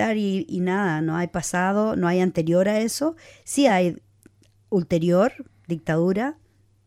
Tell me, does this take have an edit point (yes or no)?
no